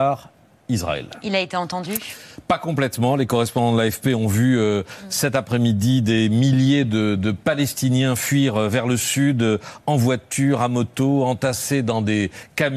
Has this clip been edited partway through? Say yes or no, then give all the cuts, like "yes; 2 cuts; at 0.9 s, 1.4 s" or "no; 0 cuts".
no; 0 cuts